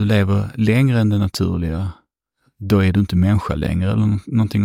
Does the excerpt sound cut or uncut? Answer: uncut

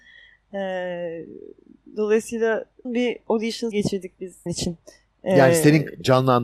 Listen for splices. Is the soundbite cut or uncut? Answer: cut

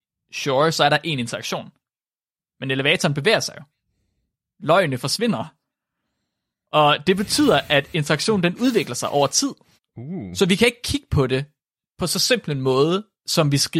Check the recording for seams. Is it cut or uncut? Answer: cut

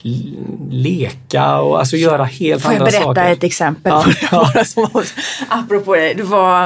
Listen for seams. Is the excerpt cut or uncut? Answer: uncut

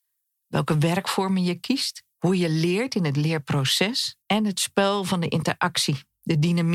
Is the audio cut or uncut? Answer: cut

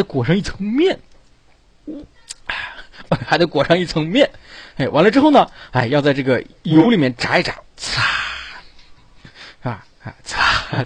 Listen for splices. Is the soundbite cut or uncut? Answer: cut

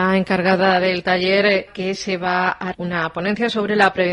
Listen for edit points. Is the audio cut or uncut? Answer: cut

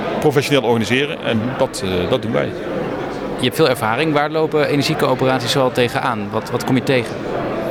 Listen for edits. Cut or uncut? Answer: uncut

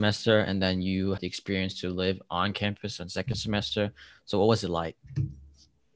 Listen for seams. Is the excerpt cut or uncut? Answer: cut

